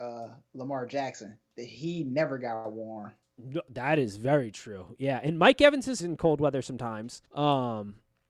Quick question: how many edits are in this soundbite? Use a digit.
2